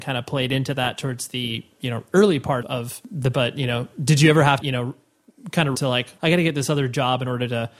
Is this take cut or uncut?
cut